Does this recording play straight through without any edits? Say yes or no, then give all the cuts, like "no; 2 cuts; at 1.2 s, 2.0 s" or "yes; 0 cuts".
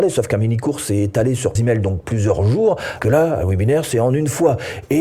no; 2 cuts; at 1.6 s, 3.0 s